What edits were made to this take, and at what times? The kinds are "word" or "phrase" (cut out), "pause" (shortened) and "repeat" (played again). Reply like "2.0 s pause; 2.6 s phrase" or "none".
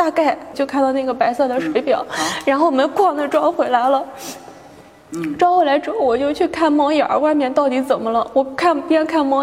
none